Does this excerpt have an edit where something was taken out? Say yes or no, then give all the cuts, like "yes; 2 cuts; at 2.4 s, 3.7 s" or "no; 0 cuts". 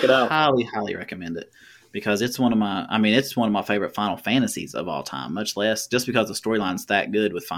no; 0 cuts